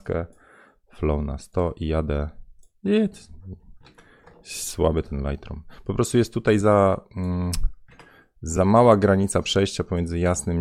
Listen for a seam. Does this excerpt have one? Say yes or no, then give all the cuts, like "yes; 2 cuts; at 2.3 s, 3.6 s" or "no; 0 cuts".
no; 0 cuts